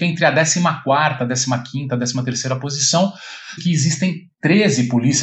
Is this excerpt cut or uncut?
cut